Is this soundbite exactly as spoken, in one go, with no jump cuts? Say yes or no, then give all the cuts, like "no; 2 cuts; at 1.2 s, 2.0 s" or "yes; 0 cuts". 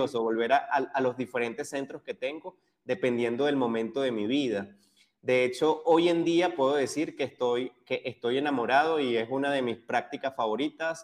yes; 0 cuts